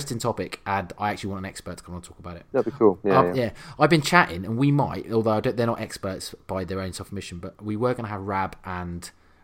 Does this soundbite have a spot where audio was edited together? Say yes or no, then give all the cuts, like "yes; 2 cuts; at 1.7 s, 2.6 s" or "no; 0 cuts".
yes; 1 cut; at 2.5 s